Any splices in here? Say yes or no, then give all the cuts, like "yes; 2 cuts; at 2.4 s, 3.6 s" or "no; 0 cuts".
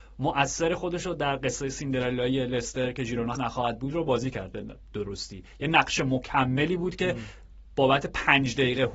yes; 1 cut; at 3.3 s